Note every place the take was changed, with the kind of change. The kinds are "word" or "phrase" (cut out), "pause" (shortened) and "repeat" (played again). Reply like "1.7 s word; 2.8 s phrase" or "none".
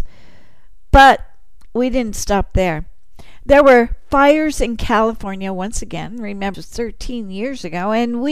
6.5 s word

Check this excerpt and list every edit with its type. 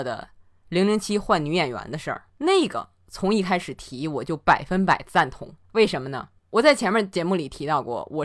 2.3 s pause; 5.6 s pause; 6.4 s pause

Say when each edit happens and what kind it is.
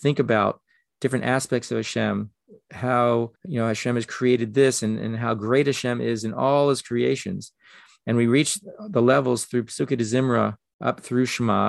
3.4 s pause

